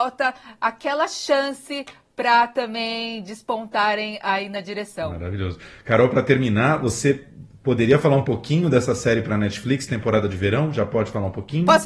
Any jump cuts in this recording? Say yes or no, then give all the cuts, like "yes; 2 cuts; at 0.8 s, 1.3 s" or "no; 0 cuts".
no; 0 cuts